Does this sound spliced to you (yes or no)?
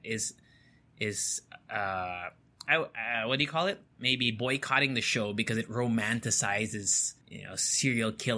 yes